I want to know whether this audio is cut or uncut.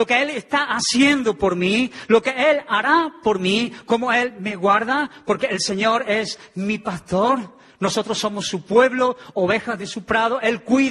uncut